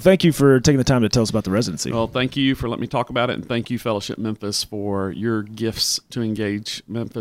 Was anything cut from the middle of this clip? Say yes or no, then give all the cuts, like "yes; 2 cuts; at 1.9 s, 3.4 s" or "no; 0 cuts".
no; 0 cuts